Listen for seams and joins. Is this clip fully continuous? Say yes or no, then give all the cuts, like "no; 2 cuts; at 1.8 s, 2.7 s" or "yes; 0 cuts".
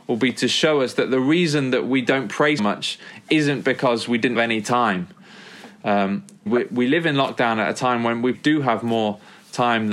no; 4 cuts; at 2.6 s, 4.3 s, 6.5 s, 8.3 s